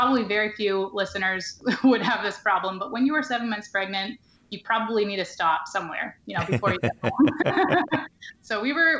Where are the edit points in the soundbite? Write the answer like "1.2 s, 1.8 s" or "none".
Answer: none